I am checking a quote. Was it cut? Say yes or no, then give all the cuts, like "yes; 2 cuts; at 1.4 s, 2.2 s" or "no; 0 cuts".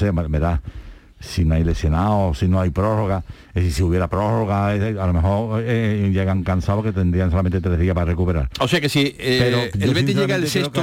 no; 0 cuts